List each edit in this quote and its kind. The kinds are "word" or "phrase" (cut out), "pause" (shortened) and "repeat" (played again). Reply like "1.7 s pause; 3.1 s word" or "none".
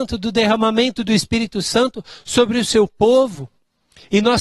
none